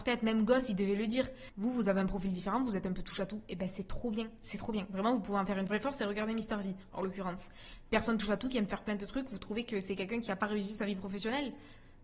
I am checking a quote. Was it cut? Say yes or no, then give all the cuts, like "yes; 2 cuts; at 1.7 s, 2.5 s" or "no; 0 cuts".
no; 0 cuts